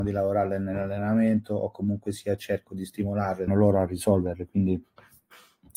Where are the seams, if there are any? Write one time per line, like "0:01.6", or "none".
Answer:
0:03.5